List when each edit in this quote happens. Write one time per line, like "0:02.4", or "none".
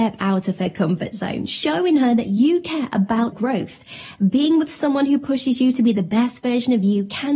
0:03.3